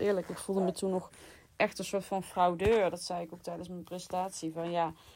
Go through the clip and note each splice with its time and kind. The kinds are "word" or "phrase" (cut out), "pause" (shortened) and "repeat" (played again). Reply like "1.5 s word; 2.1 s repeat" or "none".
none